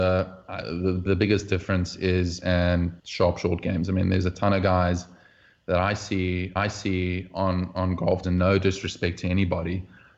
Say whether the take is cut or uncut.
cut